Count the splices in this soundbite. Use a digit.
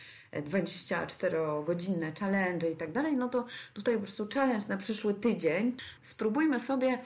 0